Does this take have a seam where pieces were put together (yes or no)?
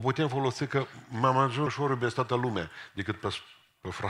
yes